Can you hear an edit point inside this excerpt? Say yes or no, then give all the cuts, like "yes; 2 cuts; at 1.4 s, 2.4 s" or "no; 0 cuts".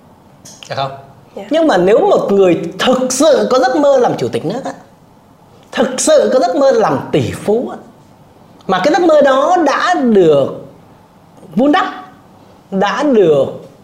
no; 0 cuts